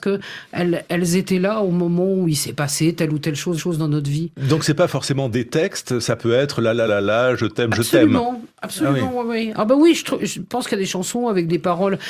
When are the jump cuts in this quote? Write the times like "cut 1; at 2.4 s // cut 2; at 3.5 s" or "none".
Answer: cut 1; at 3.6 s // cut 2; at 6.9 s